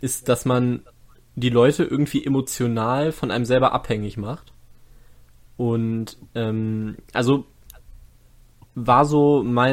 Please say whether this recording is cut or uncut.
uncut